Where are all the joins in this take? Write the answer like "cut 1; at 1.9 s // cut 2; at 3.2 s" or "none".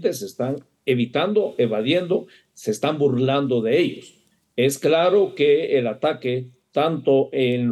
none

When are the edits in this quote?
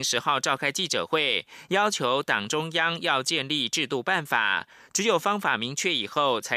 none

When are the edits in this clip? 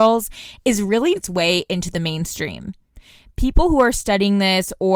cut 1; at 1.2 s

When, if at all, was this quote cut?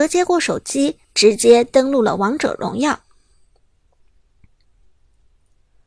cut 1; at 1.0 s

